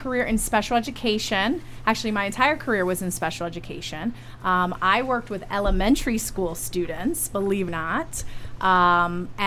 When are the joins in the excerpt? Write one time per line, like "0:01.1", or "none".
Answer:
0:07.7